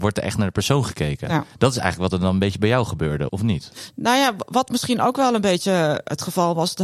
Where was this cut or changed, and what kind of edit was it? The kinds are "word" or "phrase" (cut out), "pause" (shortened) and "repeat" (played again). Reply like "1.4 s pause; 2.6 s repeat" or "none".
3.3 s word